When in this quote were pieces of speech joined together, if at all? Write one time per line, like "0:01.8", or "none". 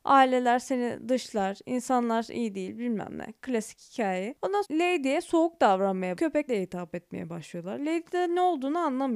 0:04.6
0:06.2
0:06.5